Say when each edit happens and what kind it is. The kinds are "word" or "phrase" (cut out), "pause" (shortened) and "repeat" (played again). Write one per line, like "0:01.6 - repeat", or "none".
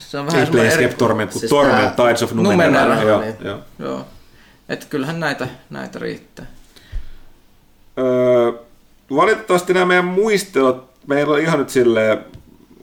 none

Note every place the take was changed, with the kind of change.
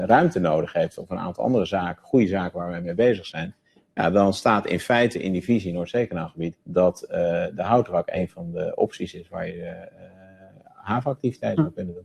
0:06.6 - pause

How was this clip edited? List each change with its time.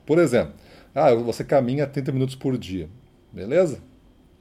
none

